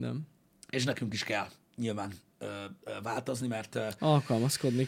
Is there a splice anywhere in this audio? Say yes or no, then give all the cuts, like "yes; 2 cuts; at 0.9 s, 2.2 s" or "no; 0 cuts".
no; 0 cuts